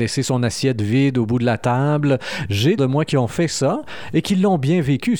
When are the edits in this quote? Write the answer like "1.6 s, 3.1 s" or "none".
2.8 s